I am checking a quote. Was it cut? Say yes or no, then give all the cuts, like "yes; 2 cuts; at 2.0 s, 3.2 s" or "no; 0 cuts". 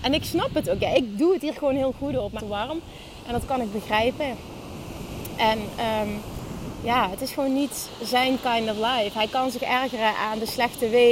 yes; 1 cut; at 2.4 s